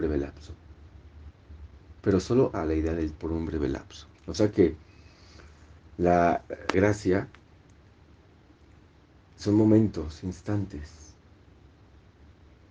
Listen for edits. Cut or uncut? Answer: cut